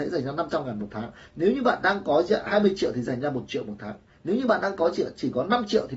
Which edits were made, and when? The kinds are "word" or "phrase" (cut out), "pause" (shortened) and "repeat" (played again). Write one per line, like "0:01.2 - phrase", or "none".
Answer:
none